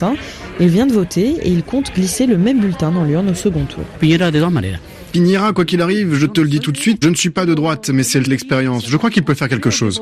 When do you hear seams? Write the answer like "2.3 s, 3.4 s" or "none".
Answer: 7.0 s, 8.3 s